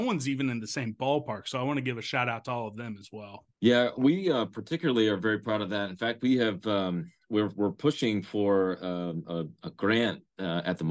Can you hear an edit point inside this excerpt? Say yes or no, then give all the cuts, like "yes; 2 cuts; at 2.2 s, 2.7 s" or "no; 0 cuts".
yes; 1 cut; at 3.5 s